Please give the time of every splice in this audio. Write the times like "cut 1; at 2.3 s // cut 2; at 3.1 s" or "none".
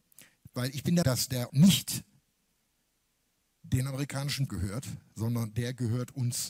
cut 1; at 1.0 s // cut 2; at 1.5 s // cut 3; at 4.5 s

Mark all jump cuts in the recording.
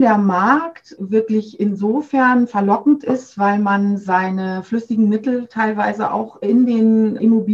none

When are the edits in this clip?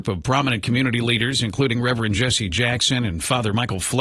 none

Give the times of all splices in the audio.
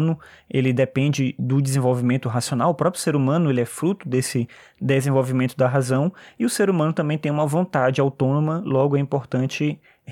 none

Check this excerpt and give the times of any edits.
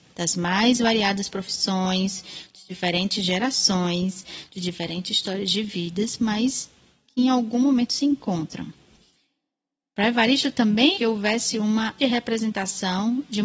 cut 1; at 10.9 s // cut 2; at 12.0 s

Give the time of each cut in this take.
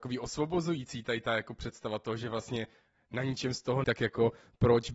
cut 1; at 3.8 s

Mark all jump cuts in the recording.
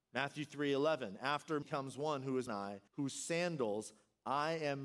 cut 1; at 1.6 s // cut 2; at 2.5 s // cut 3; at 2.9 s

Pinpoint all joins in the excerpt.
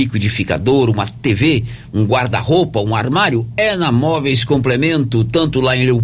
none

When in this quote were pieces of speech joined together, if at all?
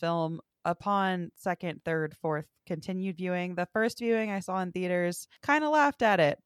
cut 1; at 5.4 s

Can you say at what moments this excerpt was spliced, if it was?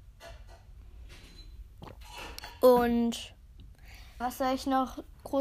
cut 1; at 4.2 s

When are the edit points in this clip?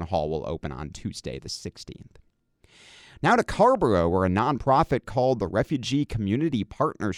none

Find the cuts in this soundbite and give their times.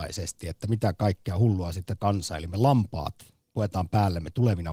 cut 1; at 2.0 s

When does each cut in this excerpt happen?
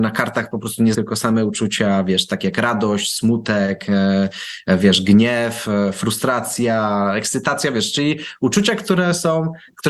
cut 1; at 0.9 s

